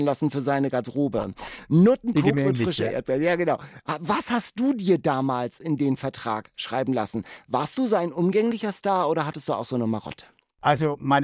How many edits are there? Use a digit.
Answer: 0